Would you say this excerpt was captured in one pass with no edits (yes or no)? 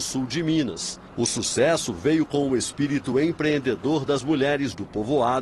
yes